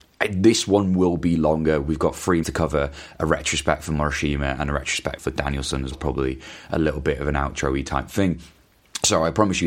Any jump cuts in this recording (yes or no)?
yes